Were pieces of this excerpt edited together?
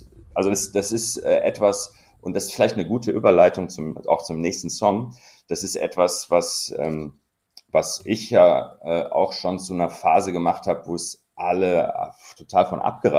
no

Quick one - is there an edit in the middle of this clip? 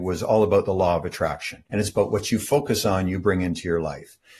yes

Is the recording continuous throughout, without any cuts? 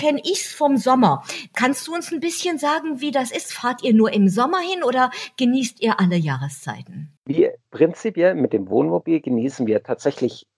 no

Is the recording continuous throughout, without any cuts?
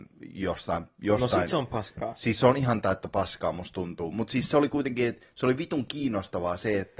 yes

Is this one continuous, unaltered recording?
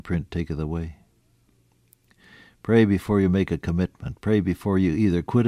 yes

